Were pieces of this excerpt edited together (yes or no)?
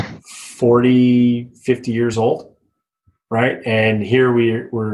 no